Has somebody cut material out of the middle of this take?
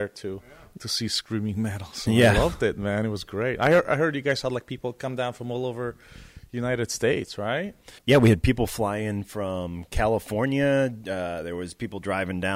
yes; 1 cut; at 8.0 s

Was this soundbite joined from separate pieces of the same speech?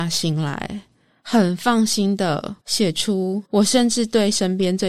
yes; 2 cuts; at 2.6 s, 3.5 s

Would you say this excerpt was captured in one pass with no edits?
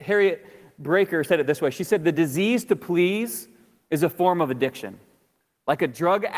yes; 0 cuts

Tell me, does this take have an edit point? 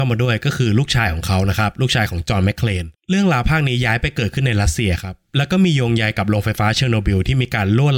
yes; 1 cut; at 2.9 s

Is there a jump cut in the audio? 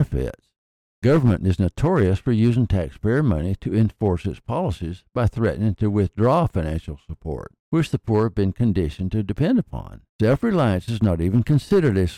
yes; 2 cuts; at 7.6 s, 10.1 s

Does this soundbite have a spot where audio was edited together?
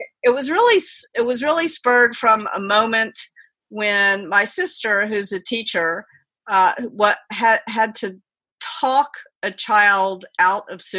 no; 0 cuts

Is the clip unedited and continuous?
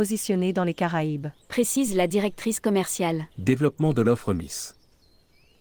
no; 2 cuts; at 1.4 s, 3.3 s

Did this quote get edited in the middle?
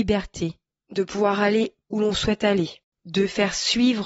yes; 1 cut; at 1.8 s

